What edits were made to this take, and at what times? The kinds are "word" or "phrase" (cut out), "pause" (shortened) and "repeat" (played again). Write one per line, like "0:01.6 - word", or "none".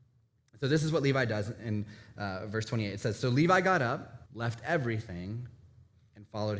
0:04.3 - pause